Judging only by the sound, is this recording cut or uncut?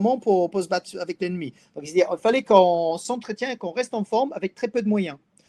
uncut